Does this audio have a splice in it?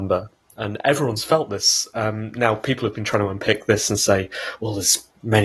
no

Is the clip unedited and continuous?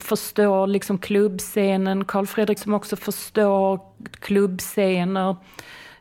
no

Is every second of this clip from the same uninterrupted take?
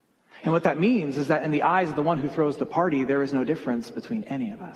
yes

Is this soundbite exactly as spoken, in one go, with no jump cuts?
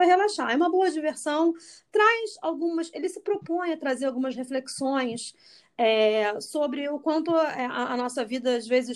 yes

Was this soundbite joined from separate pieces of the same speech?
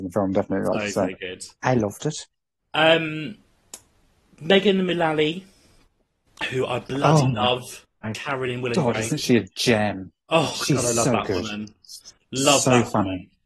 no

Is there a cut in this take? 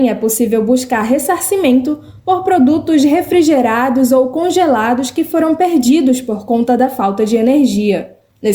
no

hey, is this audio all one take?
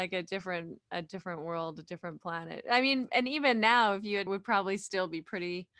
no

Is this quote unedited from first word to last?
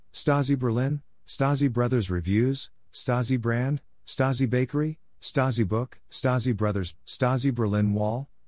no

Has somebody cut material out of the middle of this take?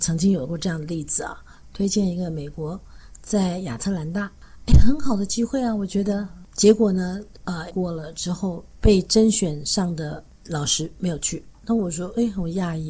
yes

